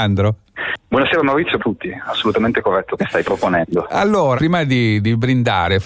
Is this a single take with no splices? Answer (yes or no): no